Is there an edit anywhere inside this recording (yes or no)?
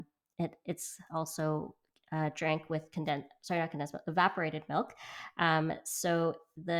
no